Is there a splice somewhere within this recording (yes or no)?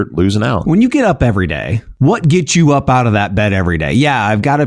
no